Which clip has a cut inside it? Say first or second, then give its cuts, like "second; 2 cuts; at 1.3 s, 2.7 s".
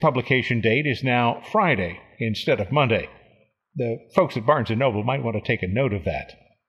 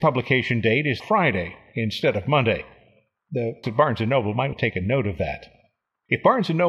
second; 3 cuts; at 1.0 s, 3.6 s, 4.5 s